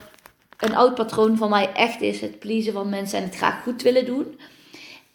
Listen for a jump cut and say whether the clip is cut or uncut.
uncut